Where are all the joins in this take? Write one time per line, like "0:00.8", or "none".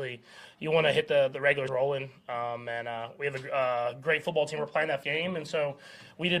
0:01.7
0:05.0